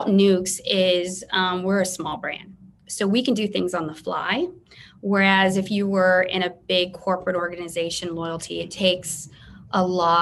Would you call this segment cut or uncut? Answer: uncut